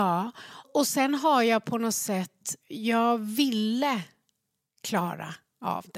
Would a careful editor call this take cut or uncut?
uncut